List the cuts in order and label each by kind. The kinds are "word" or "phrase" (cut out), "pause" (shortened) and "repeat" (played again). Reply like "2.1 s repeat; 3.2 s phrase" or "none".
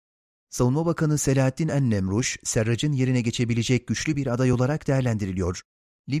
none